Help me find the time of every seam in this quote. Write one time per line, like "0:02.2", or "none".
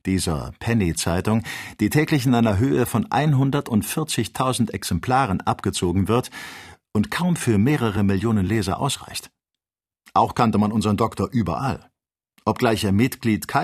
none

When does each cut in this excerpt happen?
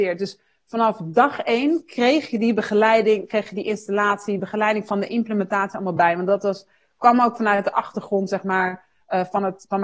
none

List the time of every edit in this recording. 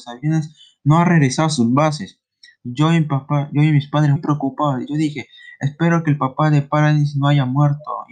0:04.2

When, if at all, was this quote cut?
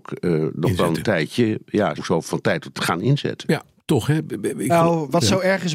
0:02.0
0:02.7
0:03.8

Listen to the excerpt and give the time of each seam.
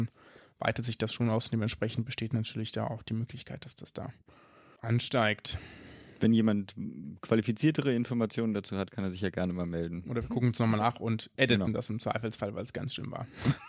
none

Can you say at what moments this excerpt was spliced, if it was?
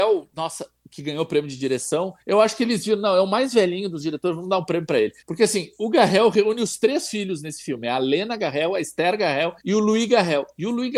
0:02.2
0:05.2
0:09.6

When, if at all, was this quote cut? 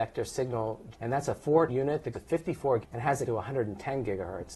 0:00.9
0:01.7
0:02.1
0:02.8
0:03.2

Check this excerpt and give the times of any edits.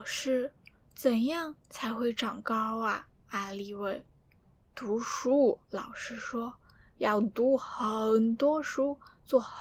0:03.2
0:05.6

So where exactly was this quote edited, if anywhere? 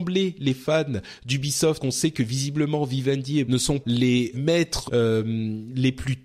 0:01.8
0:03.4
0:03.8
0:04.3
0:04.9

